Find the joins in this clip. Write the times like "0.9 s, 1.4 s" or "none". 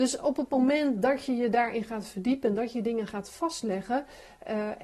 none